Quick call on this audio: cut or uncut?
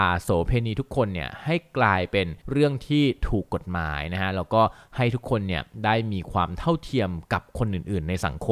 cut